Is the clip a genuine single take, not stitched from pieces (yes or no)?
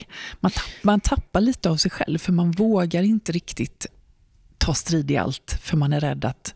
yes